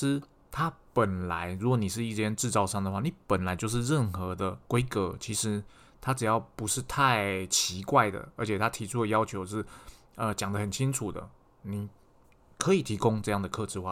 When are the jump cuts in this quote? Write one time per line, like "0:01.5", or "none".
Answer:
0:04.6